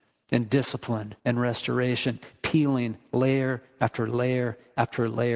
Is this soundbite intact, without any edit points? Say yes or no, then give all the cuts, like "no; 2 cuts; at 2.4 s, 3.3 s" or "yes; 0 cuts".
no; 1 cut; at 1.2 s